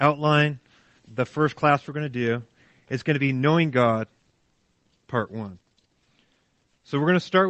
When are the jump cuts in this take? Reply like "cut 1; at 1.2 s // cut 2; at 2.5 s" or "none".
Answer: cut 1; at 1.0 s